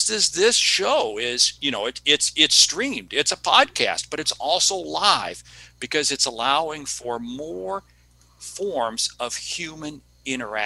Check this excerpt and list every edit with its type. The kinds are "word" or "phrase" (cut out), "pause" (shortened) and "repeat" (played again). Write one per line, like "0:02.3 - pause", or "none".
none